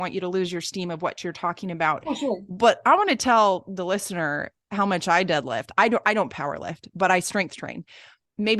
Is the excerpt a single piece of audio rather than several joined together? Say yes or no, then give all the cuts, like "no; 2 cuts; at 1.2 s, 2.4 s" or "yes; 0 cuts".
no; 1 cut; at 4.6 s